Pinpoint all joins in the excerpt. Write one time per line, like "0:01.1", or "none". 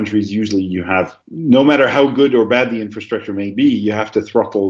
0:01.2